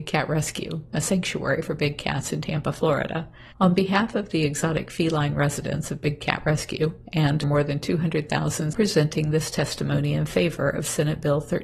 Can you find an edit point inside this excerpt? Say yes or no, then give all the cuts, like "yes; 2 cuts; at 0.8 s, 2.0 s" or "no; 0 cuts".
yes; 3 cuts; at 3.5 s, 7.4 s, 8.7 s